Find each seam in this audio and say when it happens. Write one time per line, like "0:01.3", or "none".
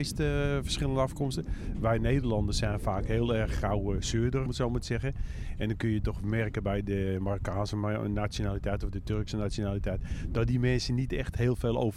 0:04.5